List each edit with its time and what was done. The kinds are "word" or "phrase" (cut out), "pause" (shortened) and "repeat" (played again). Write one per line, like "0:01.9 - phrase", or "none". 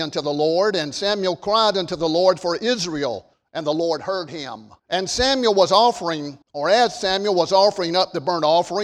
0:03.3 - pause
0:04.8 - pause
0:06.4 - pause